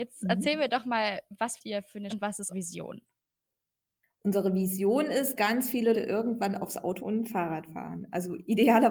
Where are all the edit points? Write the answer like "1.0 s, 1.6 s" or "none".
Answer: 1.6 s, 2.1 s, 2.5 s, 5.4 s, 5.9 s, 7.0 s